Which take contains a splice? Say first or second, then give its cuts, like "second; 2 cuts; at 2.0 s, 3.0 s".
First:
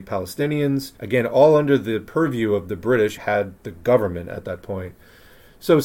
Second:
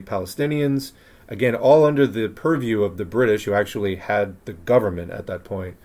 first; 2 cuts; at 1.0 s, 3.2 s